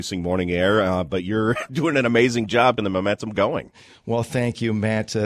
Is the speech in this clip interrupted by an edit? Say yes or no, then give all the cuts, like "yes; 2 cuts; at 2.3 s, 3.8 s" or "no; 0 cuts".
yes; 1 cut; at 2.8 s